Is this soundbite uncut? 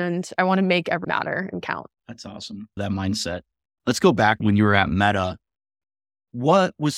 no; 4 cuts; at 1.0 s, 2.0 s, 2.8 s, 4.4 s

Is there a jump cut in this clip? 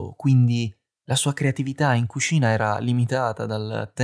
no; 0 cuts

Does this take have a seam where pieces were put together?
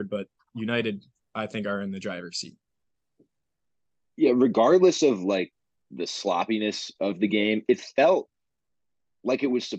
no; 0 cuts

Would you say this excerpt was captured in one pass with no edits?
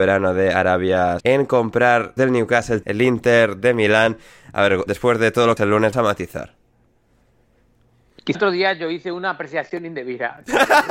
no; 7 cuts; at 1.2 s, 2.2 s, 2.8 s, 4.9 s, 5.6 s, 5.9 s, 8.3 s

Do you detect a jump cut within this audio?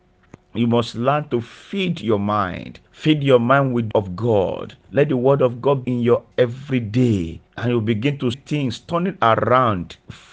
yes; 7 cuts; at 2.9 s, 3.9 s, 4.8 s, 5.8 s, 6.3 s, 7.5 s, 8.3 s

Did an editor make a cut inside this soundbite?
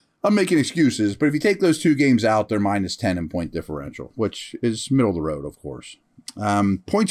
no; 0 cuts

